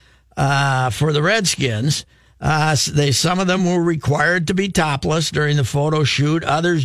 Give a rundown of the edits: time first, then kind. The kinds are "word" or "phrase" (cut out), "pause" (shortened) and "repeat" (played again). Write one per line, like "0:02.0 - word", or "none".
none